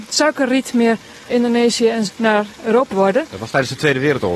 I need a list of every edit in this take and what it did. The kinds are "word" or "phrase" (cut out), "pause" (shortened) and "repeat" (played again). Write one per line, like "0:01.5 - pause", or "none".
0:01.3 - word
0:02.1 - word
0:02.9 - word